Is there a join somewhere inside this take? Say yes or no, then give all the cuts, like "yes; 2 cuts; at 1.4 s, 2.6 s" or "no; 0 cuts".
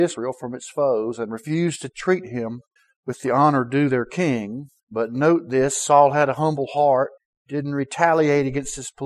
yes; 3 cuts; at 2.8 s, 4.8 s, 7.2 s